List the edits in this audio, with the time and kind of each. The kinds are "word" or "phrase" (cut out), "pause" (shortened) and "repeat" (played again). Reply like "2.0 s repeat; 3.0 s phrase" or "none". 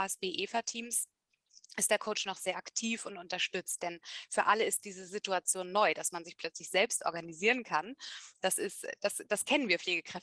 none